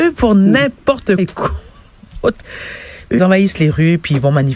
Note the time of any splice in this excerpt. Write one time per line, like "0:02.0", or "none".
0:01.2
0:03.2